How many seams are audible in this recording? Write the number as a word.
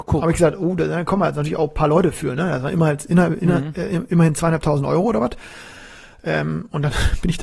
zero